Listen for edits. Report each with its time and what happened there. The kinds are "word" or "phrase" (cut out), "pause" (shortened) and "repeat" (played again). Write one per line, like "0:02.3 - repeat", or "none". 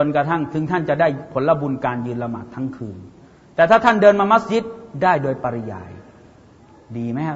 none